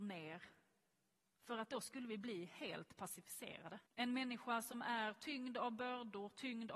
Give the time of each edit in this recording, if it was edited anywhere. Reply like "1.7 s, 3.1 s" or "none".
3.9 s